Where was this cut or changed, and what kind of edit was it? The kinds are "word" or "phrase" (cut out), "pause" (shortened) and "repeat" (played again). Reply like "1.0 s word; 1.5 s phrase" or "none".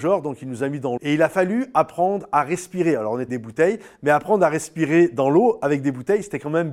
1.0 s word; 3.3 s word